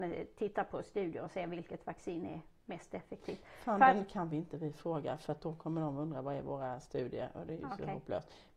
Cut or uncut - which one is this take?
uncut